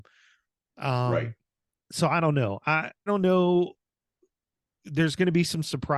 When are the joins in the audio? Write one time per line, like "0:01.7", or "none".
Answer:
0:01.7
0:03.1